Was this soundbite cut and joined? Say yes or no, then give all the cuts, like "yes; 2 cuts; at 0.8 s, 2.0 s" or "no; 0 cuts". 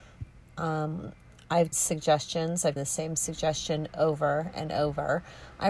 yes; 2 cuts; at 1.7 s, 2.8 s